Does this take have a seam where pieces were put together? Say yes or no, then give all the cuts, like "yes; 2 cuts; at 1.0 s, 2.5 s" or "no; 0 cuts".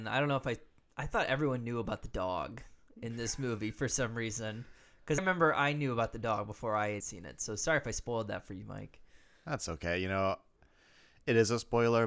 yes; 2 cuts; at 5.2 s, 7.0 s